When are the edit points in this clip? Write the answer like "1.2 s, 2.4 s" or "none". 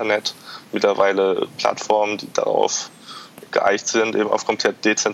3.5 s